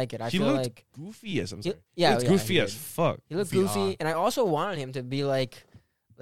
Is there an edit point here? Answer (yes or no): no